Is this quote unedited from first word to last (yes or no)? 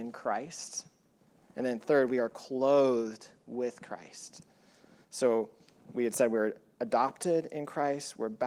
yes